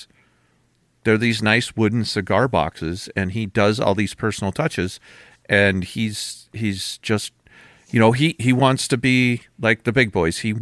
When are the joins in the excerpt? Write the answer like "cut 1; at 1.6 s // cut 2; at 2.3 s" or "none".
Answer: none